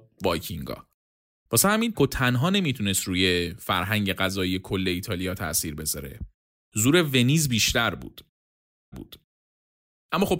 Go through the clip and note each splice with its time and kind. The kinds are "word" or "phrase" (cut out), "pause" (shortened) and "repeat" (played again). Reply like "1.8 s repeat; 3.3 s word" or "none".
1.9 s word; 8.9 s repeat

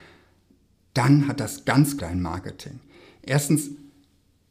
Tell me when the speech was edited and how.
2.0 s phrase

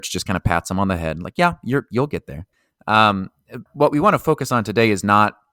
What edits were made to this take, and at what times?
3.7 s word

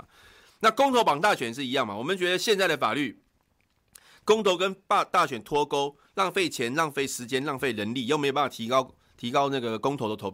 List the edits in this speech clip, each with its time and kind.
none

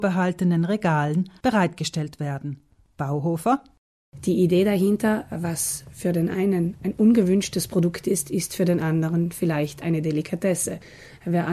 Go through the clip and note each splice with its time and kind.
none

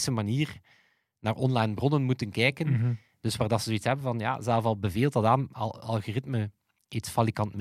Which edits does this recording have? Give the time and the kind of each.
none

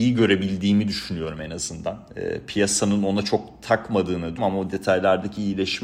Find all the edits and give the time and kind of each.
4.4 s word

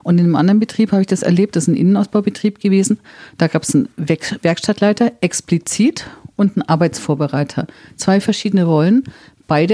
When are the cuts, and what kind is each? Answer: none

